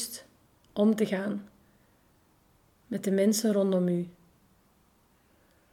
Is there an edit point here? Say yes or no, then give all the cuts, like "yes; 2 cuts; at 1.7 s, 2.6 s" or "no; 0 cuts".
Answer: no; 0 cuts